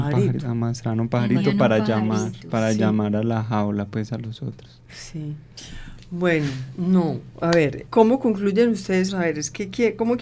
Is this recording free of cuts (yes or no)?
no